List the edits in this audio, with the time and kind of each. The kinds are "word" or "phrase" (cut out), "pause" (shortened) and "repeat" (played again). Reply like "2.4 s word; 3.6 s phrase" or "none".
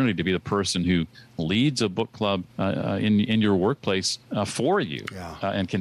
2.5 s pause; 4.2 s pause